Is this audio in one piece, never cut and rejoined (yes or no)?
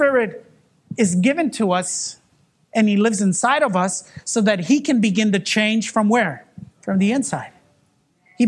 no